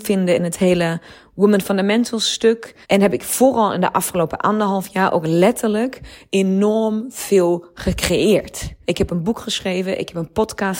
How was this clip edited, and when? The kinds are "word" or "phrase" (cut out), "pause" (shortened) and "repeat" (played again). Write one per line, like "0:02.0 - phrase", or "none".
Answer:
0:02.8 - pause
0:08.8 - pause